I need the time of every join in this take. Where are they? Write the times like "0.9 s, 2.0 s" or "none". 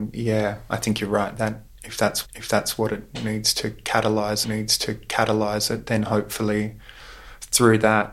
2.2 s, 4.4 s